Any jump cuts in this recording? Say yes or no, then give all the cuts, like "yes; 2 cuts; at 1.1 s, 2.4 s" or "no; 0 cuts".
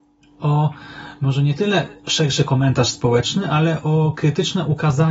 no; 0 cuts